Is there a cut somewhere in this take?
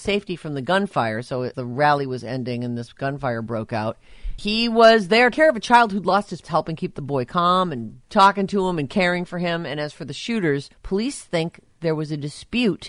yes; 6 cuts; at 1.5 s, 4.4 s, 5.3 s, 6.4 s, 8.0 s, 10.7 s

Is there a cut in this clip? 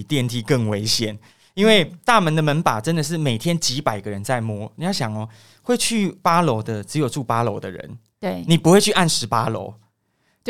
no; 0 cuts

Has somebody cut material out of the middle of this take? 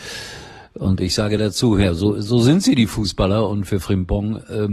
no; 0 cuts

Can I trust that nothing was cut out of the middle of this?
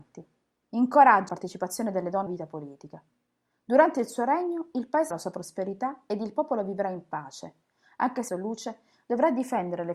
no; 4 cuts; at 1.3 s, 2.3 s, 5.1 s, 8.3 s

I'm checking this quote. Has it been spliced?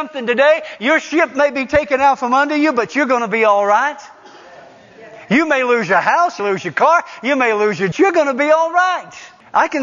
yes; 2 cuts; at 6.4 s, 7.9 s

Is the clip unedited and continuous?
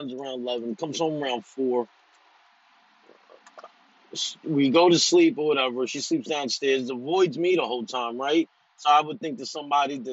yes; 0 cuts

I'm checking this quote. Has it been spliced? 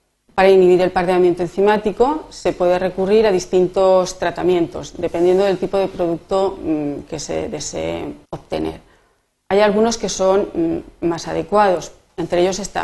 yes; 1 cut; at 8.2 s

